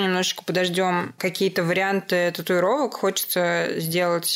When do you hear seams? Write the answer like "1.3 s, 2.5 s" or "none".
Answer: none